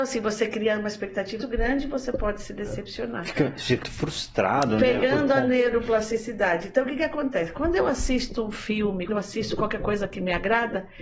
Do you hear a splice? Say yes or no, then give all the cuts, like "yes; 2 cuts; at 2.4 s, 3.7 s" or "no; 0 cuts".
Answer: yes; 3 cuts; at 1.4 s, 3.8 s, 9.1 s